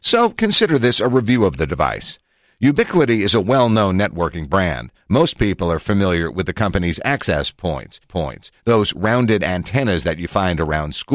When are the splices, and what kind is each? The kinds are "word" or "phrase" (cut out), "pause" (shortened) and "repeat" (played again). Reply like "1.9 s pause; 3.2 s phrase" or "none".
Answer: 8.0 s repeat